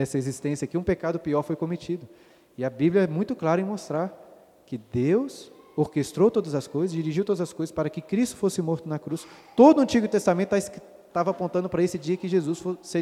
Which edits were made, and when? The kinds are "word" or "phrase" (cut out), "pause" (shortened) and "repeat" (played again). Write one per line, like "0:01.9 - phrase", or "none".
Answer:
none